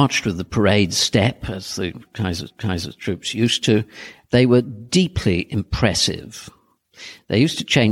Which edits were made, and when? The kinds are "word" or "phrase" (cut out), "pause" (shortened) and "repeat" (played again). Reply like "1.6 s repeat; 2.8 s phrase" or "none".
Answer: 2.5 s repeat

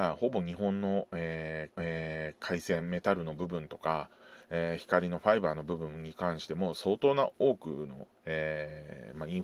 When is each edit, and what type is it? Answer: 1.7 s repeat; 8.2 s pause

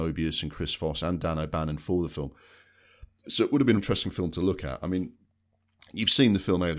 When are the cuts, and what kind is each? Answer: 3.8 s word

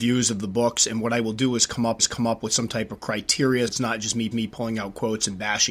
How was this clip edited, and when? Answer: 2.0 s repeat; 3.7 s word; 4.3 s repeat

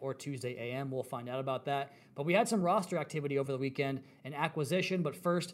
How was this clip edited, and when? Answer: none

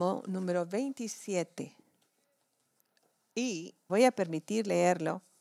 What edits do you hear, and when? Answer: 3.9 s word

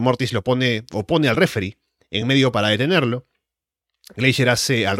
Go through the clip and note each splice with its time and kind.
none

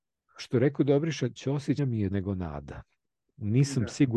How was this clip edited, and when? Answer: 1.4 s word; 1.8 s word; 2.1 s word

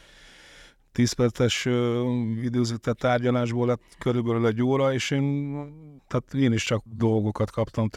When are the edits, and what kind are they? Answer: 6.0 s pause; 6.9 s word

